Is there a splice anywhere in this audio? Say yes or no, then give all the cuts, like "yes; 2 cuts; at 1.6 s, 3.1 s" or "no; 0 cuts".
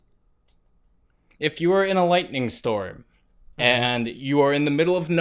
yes; 1 cut; at 3.5 s